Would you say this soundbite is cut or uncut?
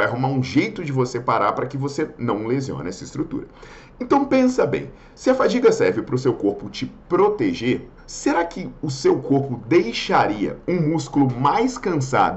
cut